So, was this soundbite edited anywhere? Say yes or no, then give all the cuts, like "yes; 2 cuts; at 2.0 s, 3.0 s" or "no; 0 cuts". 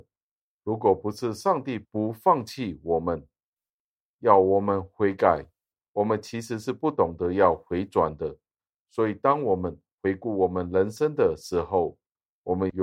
no; 0 cuts